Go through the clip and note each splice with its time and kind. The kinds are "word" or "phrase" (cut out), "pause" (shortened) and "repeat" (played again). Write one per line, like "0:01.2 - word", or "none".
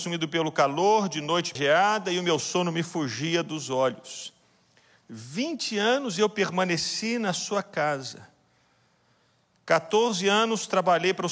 0:01.5 - word

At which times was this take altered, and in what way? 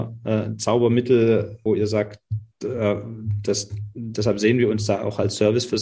0:01.7 - word

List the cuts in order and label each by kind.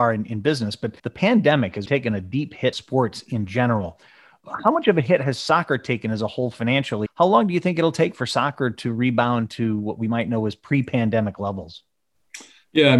0:01.0 - pause
0:01.9 - word
0:02.7 - word
0:07.1 - word

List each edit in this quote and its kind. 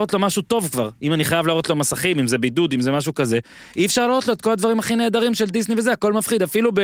0:01.0 - pause

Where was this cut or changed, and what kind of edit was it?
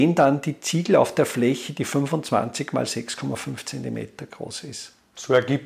none

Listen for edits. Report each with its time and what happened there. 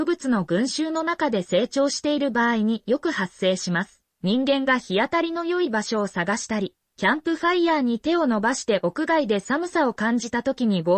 0:04.1 - pause

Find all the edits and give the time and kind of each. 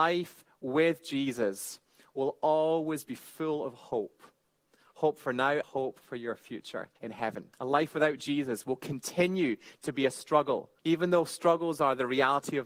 0:05.6 - word
0:07.0 - pause
0:07.5 - pause
0:10.8 - pause

